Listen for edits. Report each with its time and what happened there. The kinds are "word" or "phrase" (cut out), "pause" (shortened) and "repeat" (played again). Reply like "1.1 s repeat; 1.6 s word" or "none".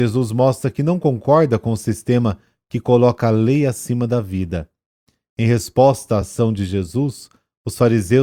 none